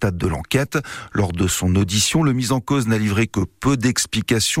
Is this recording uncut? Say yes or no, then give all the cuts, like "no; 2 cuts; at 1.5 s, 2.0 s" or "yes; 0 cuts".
yes; 0 cuts